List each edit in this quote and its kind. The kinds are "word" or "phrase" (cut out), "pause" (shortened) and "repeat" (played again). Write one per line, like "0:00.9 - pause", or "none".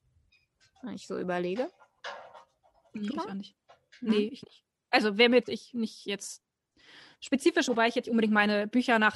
0:03.1 - word
0:04.4 - word
0:05.4 - word
0:07.7 - word
0:08.0 - word